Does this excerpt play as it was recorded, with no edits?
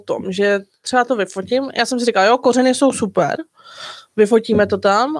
yes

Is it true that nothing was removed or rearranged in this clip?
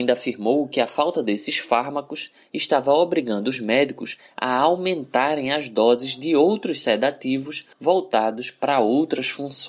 no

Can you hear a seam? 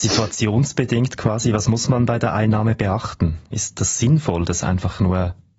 no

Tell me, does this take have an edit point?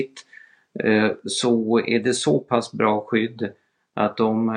no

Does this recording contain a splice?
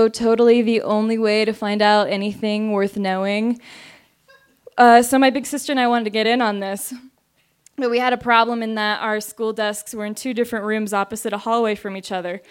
no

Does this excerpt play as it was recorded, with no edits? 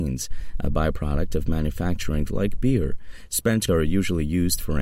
no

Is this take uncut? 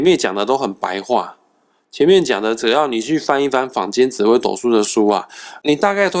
yes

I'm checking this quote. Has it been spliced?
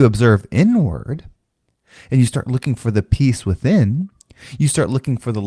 no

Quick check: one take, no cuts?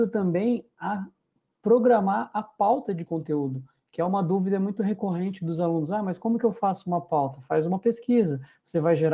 yes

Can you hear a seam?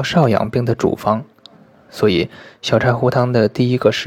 no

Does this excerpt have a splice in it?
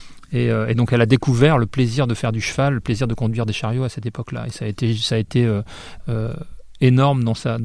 no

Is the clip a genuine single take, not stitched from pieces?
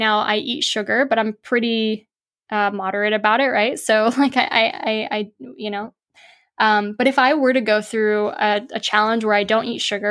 yes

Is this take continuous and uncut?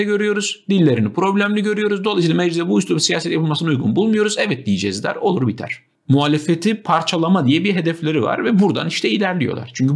yes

